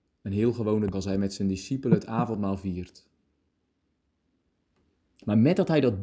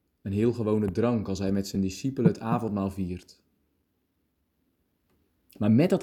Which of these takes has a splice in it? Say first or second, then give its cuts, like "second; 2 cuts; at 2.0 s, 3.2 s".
first; 1 cut; at 0.9 s